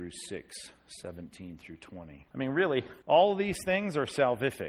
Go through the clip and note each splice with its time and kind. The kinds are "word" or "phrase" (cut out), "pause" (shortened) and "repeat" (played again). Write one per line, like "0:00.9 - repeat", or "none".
0:02.3 - pause
0:03.0 - pause